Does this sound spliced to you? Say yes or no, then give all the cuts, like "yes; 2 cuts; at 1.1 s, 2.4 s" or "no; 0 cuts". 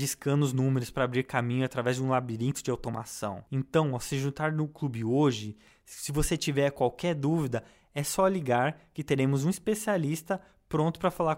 no; 0 cuts